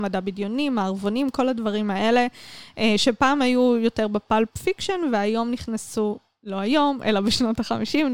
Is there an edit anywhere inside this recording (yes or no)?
no